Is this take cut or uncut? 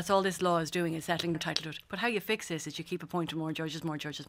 cut